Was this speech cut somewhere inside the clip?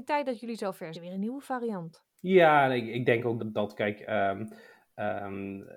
yes; 3 cuts; at 0.9 s, 2.1 s, 3.4 s

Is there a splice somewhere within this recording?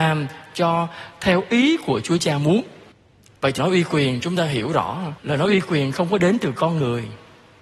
yes; 3 cuts; at 2.9 s, 3.6 s, 5.2 s

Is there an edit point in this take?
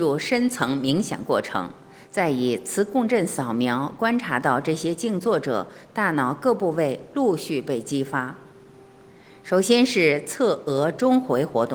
no; 0 cuts

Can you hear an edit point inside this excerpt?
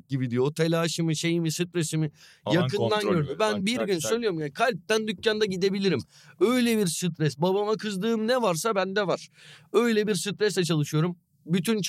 no; 0 cuts

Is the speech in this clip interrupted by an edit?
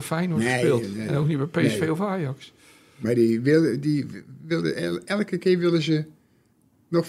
no; 0 cuts

